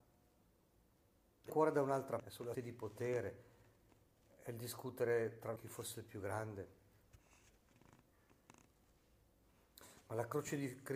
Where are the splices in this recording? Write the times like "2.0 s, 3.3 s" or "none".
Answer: 1.5 s, 2.2 s, 2.5 s, 5.6 s